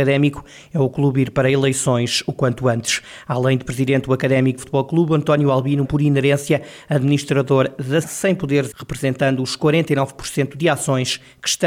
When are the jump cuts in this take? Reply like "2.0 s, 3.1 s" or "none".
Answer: 4.6 s, 5.8 s, 8.0 s, 8.7 s